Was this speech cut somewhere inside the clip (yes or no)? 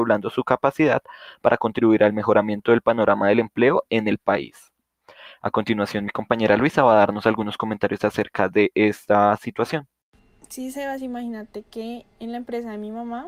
yes